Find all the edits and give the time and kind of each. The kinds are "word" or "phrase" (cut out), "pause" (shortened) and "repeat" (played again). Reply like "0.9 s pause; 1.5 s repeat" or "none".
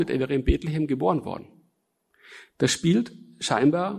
none